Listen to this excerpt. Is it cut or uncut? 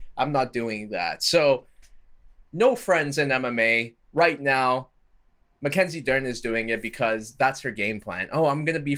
cut